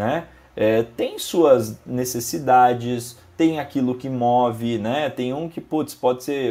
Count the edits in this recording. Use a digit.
0